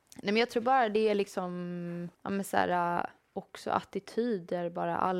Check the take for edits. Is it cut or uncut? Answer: cut